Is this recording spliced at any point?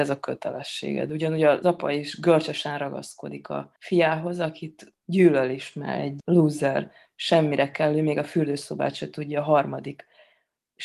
yes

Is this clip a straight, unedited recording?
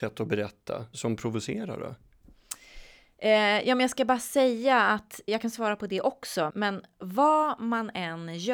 no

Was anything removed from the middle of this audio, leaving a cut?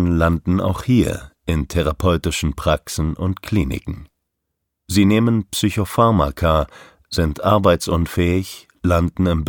no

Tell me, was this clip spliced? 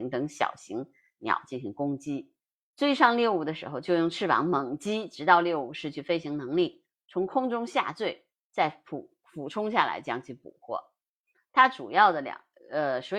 no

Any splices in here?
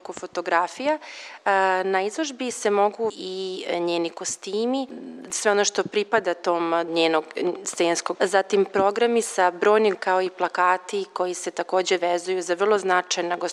yes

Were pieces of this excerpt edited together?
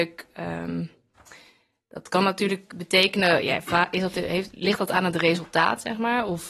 no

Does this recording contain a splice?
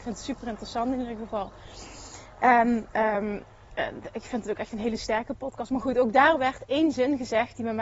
no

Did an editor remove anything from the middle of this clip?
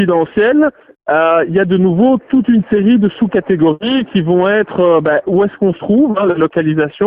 no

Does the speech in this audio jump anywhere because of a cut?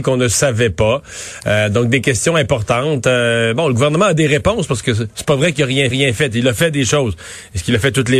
yes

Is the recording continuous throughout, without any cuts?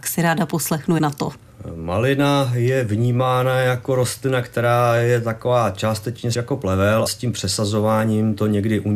no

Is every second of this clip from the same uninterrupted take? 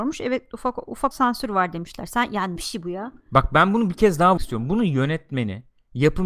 no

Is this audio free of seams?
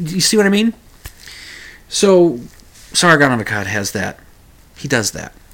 yes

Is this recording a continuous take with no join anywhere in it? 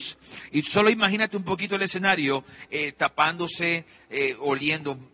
yes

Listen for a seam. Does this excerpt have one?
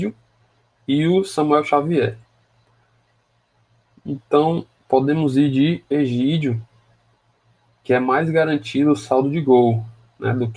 no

